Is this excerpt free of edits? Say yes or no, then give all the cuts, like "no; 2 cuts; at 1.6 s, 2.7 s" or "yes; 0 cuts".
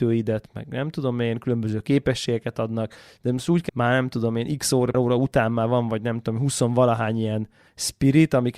no; 2 cuts; at 3.7 s, 4.9 s